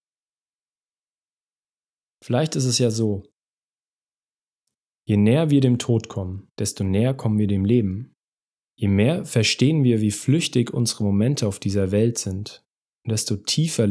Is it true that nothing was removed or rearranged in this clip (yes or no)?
no